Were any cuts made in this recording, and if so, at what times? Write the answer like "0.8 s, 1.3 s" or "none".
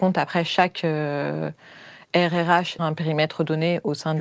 2.8 s

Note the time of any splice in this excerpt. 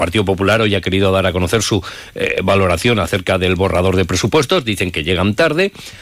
none

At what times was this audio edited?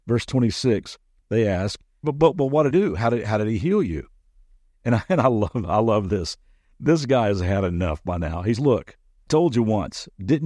2.0 s, 2.7 s, 8.6 s, 9.3 s

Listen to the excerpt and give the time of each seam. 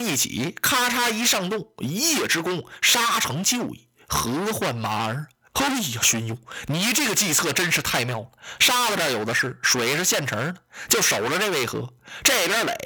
none

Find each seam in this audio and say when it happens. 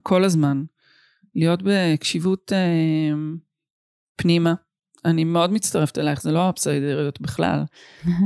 none

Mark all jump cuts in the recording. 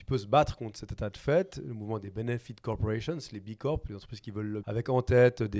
4.6 s

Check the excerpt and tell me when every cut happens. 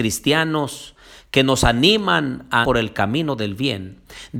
2.6 s

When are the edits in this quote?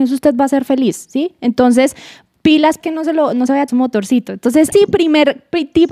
2.8 s, 3.7 s, 4.7 s

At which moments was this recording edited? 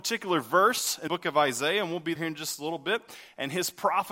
1.1 s, 2.2 s

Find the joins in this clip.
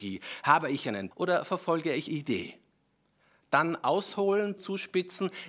1.1 s, 2.1 s, 4.6 s

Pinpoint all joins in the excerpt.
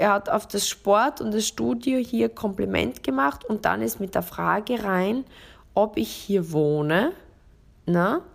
none

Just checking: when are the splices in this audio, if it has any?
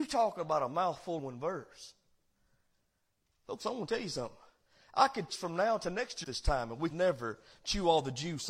1.2 s, 5.3 s, 6.2 s, 6.9 s

